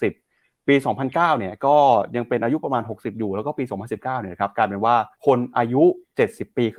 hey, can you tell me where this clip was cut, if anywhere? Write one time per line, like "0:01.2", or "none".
0:05.1